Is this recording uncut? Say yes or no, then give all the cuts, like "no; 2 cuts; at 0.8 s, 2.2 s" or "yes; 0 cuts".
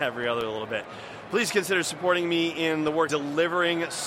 no; 1 cut; at 3.1 s